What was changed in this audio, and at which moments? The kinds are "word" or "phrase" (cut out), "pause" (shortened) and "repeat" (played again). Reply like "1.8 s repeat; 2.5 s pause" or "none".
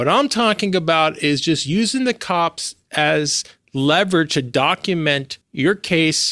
5.4 s pause